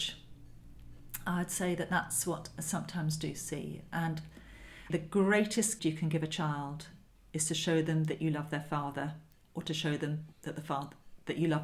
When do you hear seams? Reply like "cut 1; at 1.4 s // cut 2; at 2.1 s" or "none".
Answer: cut 1; at 4.9 s // cut 2; at 5.8 s // cut 3; at 9.3 s // cut 4; at 10.3 s